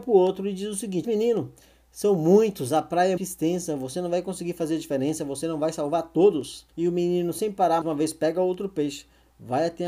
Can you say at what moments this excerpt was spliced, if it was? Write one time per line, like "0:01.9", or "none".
0:01.0
0:03.2
0:06.7
0:07.8